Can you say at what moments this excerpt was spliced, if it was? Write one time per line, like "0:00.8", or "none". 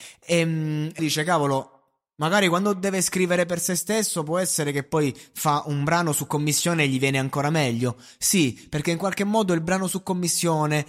0:01.0